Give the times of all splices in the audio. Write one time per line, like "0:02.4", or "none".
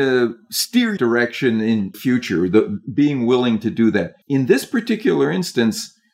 0:01.0
0:01.9
0:04.2

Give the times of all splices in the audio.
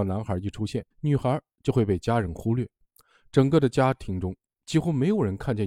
0:00.9

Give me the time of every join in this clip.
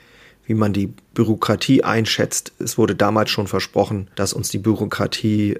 0:04.1

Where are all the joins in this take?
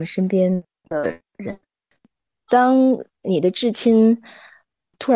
none

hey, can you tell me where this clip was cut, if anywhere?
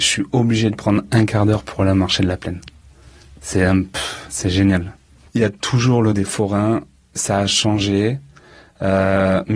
0:06.1

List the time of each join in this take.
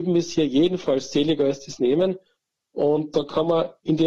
none

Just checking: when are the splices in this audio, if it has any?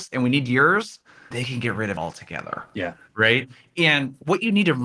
0:01.3
0:02.0

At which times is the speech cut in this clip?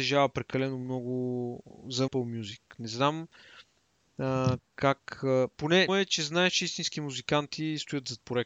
0:02.1
0:05.9

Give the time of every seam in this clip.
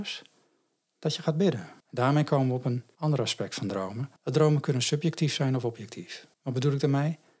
0:01.8
0:04.2
0:06.3

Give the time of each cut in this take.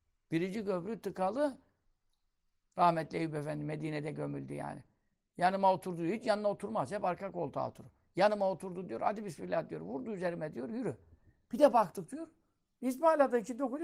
none

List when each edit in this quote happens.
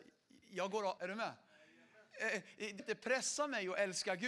0:01.0
0:02.8

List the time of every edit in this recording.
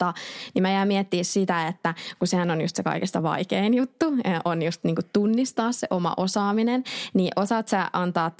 none

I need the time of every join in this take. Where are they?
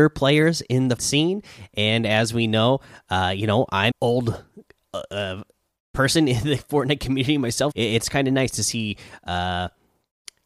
0:01.0
0:03.9
0:07.7

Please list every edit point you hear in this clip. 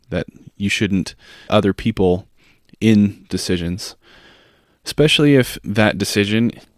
0:01.5
0:03.3

